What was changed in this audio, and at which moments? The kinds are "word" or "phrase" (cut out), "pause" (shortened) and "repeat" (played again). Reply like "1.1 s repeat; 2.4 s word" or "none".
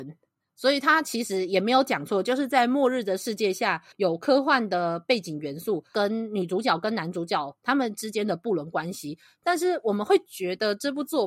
3.9 s pause